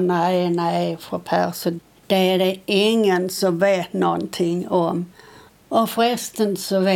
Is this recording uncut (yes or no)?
yes